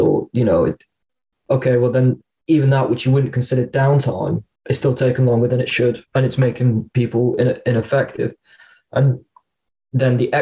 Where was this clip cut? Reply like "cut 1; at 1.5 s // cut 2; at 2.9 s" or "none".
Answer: cut 1; at 1.1 s // cut 2; at 4.6 s // cut 3; at 6.1 s